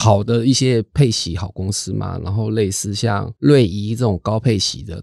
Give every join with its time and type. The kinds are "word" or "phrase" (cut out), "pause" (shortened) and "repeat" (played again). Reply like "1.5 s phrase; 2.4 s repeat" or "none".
3.4 s pause